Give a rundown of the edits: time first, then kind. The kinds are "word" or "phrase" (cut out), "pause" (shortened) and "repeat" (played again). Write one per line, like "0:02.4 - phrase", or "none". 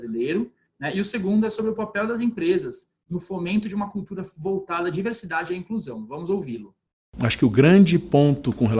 0:06.9 - pause